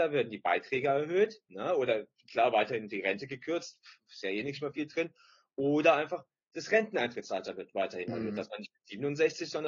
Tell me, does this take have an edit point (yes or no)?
no